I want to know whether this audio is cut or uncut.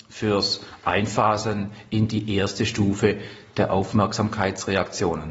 uncut